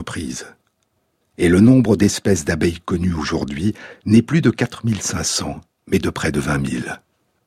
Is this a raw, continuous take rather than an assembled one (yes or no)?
yes